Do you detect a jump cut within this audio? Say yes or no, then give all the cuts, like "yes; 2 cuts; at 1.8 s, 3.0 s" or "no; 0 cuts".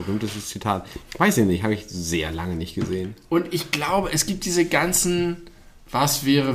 no; 0 cuts